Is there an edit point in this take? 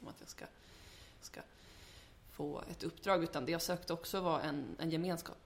yes; 1 cut; at 1.2 s

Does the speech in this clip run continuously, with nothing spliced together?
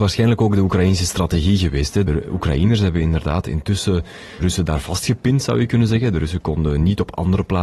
no; 1 cut; at 4.4 s

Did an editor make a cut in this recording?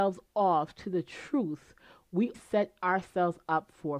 yes; 1 cut; at 2.3 s

